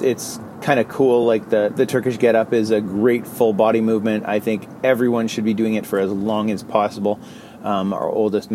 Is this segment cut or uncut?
uncut